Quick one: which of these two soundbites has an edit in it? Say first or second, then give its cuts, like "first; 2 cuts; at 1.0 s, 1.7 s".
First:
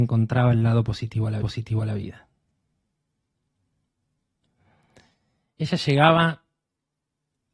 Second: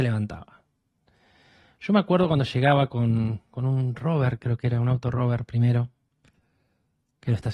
first; 1 cut; at 1.4 s